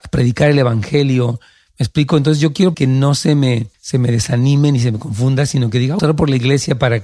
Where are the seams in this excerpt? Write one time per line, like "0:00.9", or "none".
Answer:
0:02.7
0:03.7
0:06.0